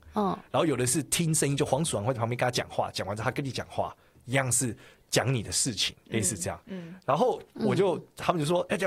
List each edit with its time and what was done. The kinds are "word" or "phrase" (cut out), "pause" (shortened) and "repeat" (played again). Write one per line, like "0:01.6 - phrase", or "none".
none